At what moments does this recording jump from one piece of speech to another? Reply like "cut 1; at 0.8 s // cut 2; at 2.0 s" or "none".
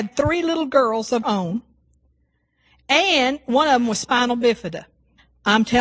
cut 1; at 1.2 s